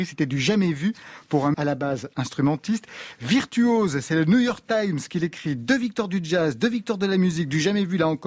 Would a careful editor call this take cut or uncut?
cut